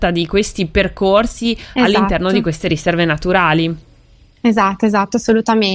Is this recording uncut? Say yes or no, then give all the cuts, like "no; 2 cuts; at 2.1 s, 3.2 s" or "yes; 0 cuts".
yes; 0 cuts